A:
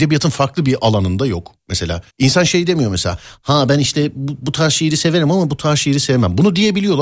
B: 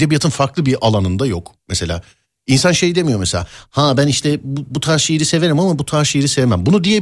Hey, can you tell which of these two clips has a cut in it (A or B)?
A